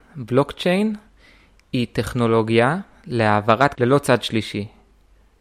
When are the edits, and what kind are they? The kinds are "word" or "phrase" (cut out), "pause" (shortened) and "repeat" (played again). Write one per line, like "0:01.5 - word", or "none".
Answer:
0:03.8 - word